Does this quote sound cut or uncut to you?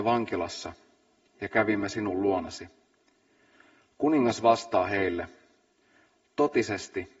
uncut